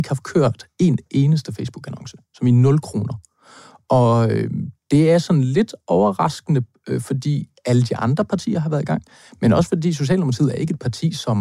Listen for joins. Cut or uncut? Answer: uncut